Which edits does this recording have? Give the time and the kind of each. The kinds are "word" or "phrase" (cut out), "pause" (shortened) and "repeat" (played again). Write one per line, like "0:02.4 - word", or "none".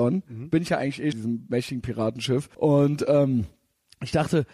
0:01.1 - phrase
0:02.5 - pause